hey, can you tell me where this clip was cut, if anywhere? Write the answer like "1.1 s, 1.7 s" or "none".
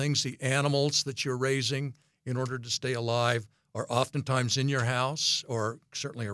none

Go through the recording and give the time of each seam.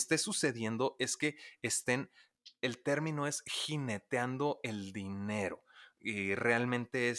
none

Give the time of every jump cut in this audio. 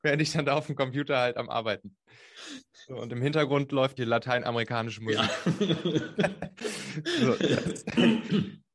4.0 s

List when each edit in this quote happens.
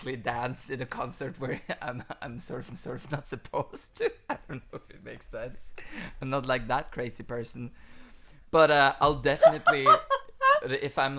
2.7 s

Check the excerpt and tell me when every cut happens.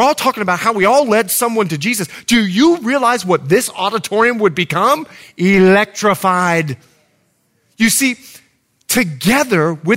none

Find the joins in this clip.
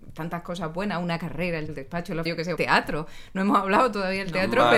1.7 s, 2.3 s, 2.6 s

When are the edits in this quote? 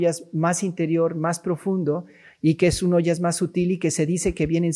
none

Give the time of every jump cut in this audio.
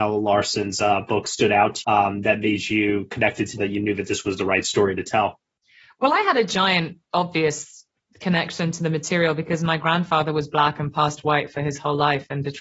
1.8 s, 3.6 s

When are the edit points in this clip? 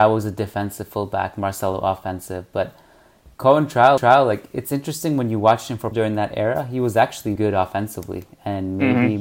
3.3 s, 4.0 s, 5.9 s, 7.4 s

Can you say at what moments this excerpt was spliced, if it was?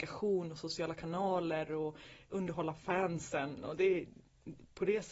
none

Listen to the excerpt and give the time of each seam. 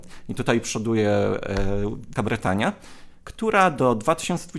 2.2 s

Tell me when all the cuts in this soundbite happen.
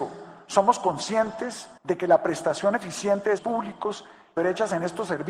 1.8 s, 3.4 s, 4.4 s

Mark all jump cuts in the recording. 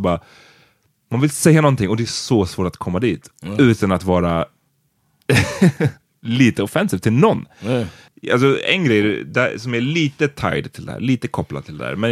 none

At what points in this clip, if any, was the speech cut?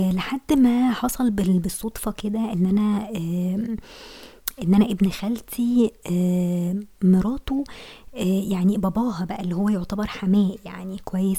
none

